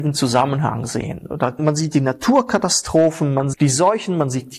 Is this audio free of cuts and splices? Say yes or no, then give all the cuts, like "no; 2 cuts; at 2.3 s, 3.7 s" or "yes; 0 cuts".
no; 2 cuts; at 1.6 s, 3.5 s